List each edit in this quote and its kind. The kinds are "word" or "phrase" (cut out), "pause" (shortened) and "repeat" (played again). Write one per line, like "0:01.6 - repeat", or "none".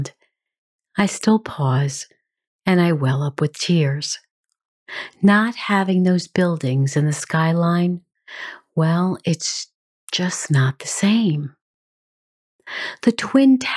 none